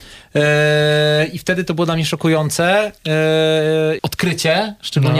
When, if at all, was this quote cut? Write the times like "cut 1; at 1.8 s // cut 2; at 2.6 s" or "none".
cut 1; at 4.0 s